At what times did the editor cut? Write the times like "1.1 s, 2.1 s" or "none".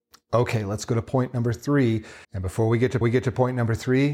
2.2 s, 3.0 s